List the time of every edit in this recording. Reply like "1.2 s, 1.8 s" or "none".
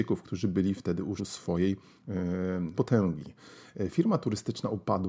1.2 s, 2.7 s